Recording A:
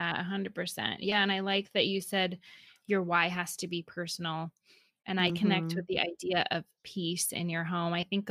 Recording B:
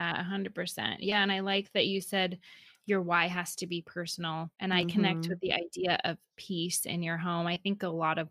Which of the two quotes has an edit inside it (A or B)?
B